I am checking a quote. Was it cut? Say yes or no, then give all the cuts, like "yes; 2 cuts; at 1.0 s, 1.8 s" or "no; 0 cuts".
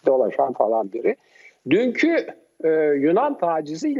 no; 0 cuts